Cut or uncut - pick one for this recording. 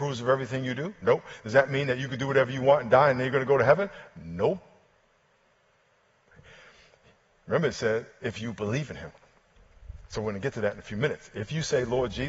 uncut